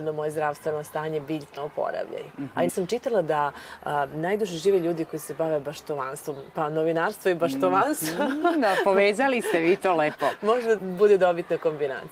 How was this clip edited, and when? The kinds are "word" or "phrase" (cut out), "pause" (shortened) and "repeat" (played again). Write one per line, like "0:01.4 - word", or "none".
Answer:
0:01.6 - word
0:02.7 - word
0:10.8 - word